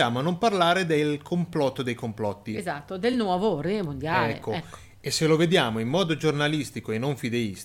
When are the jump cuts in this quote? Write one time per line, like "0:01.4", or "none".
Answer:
none